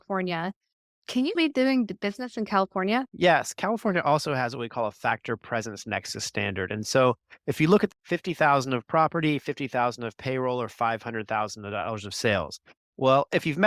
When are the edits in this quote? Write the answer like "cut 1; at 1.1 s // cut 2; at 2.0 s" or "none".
cut 1; at 1.4 s // cut 2; at 3.1 s // cut 3; at 7.9 s